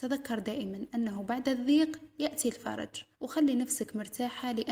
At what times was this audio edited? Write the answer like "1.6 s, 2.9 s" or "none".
3.1 s